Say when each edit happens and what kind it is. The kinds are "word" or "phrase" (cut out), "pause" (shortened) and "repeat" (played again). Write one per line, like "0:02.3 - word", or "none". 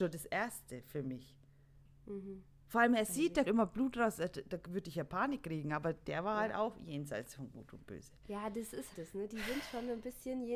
0:03.4 - word
0:08.9 - word

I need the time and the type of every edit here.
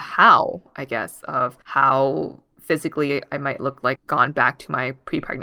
0:01.6 - pause
0:04.0 - word

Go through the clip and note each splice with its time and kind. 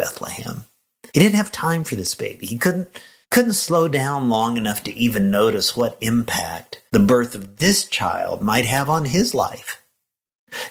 0:01.1 - pause
0:03.2 - pause
0:06.9 - pause

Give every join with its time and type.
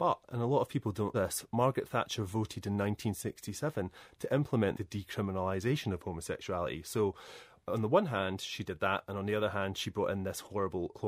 0:01.1 - word

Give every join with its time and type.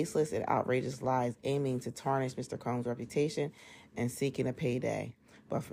none

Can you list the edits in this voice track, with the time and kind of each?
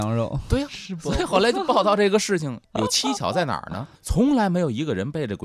0:02.6 - pause
0:04.0 - pause

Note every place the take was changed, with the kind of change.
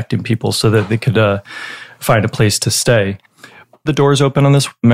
0:03.9 - phrase

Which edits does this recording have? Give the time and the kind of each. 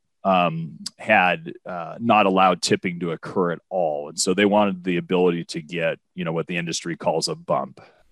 0:06.0 - pause

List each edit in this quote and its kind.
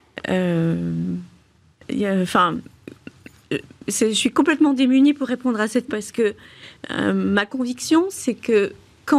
0:03.9 - word
0:05.9 - word

